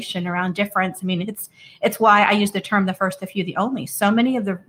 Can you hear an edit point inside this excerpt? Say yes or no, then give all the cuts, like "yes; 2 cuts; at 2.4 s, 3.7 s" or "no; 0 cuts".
no; 0 cuts